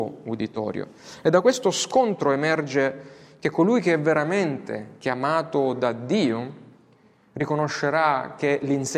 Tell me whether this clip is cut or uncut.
uncut